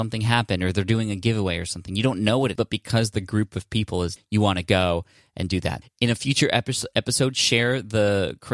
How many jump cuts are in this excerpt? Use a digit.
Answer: 3